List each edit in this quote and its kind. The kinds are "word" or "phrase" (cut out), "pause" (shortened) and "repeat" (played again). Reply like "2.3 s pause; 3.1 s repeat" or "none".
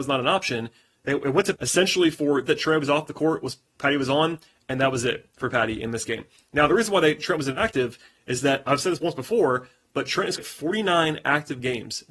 1.6 s word; 2.5 s word; 10.4 s word